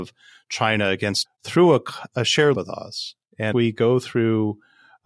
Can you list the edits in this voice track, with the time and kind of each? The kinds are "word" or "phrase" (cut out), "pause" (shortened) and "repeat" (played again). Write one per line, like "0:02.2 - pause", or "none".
0:01.2 - word
0:02.5 - word
0:03.5 - word